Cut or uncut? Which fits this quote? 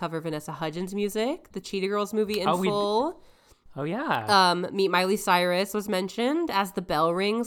uncut